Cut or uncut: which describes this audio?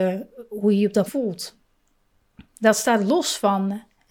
cut